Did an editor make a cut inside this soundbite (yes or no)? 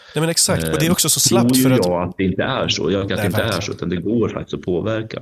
yes